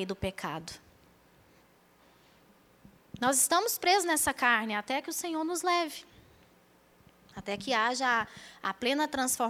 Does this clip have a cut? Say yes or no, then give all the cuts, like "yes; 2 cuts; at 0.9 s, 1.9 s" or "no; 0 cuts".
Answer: no; 0 cuts